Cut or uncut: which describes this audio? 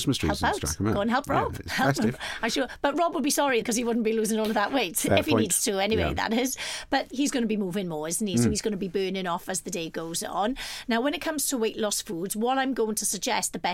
cut